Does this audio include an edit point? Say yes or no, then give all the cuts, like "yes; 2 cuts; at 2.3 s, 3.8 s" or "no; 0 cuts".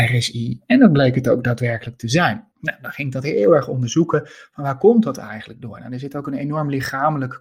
yes; 1 cut; at 2.5 s